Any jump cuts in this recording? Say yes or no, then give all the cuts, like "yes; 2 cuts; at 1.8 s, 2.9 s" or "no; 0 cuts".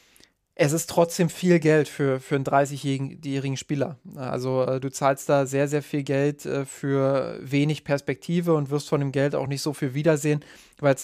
no; 0 cuts